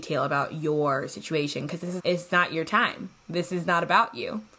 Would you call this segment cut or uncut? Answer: cut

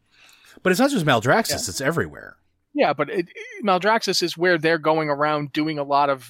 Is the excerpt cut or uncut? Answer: uncut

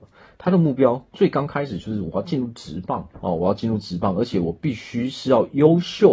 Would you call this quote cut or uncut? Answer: cut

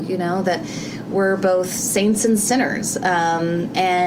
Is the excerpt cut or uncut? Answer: uncut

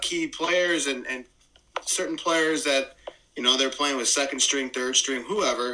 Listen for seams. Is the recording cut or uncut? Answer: uncut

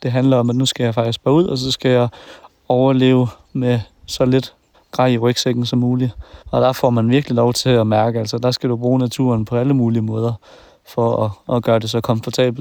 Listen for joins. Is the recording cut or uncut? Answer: cut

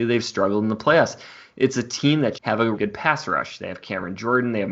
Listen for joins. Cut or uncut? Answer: cut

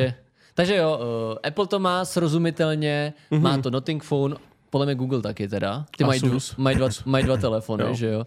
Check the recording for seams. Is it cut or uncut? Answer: cut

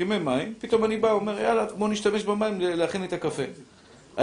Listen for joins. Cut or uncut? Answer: uncut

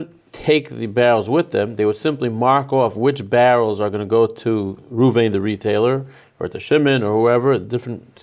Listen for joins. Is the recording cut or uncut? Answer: uncut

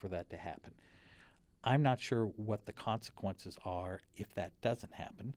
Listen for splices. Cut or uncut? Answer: uncut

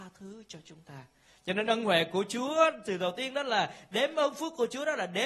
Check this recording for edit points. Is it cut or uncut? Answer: uncut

